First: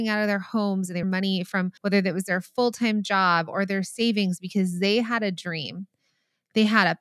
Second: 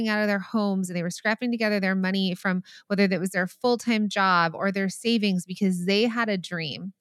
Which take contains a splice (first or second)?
first